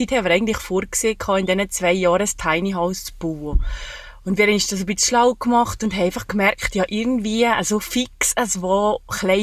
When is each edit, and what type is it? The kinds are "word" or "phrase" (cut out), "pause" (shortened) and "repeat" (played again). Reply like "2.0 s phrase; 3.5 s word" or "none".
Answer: none